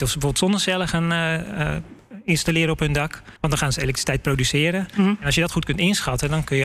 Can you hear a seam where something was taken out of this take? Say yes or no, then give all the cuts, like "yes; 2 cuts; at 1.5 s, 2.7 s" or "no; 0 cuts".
yes; 1 cut; at 3.4 s